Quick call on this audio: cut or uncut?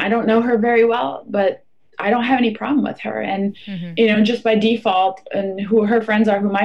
uncut